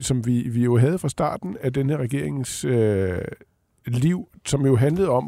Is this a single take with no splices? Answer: yes; 0 cuts

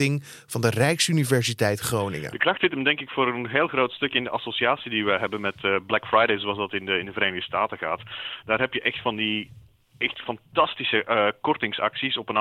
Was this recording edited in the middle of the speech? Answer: no; 0 cuts

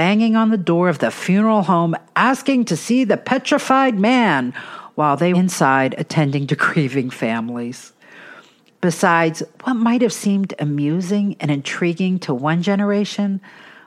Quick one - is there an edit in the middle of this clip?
yes; 1 cut; at 5.3 s

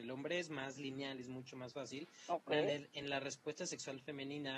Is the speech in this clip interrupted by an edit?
no; 0 cuts

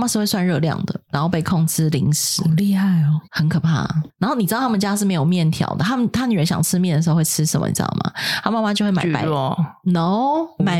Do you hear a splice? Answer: yes; 1 cut; at 3.2 s

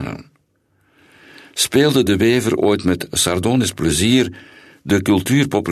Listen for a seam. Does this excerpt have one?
no; 0 cuts

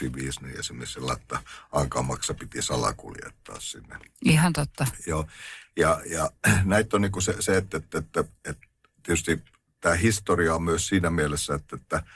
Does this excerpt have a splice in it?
yes; 1 cut; at 9.7 s

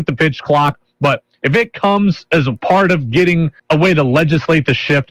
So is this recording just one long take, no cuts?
no; 1 cut; at 3.6 s

